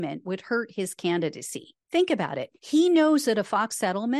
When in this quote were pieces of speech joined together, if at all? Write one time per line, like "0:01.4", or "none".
0:01.8
0:02.6